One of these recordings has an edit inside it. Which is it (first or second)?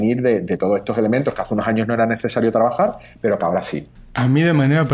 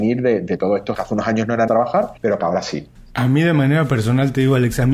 second